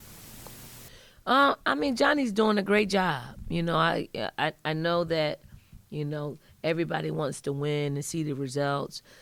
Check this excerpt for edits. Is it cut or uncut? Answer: uncut